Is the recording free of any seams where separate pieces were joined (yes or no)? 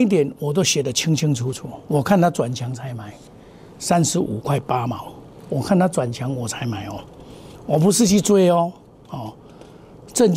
yes